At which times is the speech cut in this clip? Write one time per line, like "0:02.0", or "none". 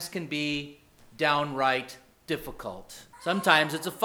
0:03.1

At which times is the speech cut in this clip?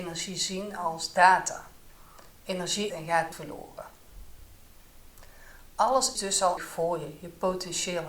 0:02.9
0:03.3
0:06.2
0:06.6

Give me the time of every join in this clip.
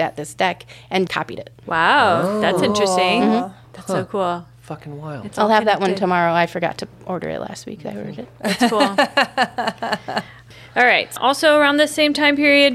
0:01.1
0:11.2

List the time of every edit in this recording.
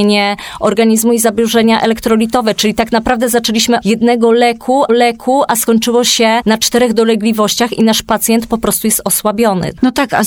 0:03.8
0:04.9

